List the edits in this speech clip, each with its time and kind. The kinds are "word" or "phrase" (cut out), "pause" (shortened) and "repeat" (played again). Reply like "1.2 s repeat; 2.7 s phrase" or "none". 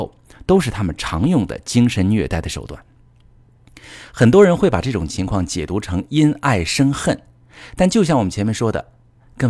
none